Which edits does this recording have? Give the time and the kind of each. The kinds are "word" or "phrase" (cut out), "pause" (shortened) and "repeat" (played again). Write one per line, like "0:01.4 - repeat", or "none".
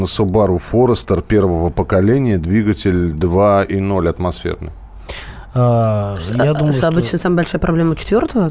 none